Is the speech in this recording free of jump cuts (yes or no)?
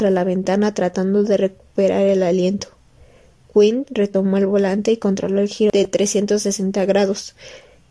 yes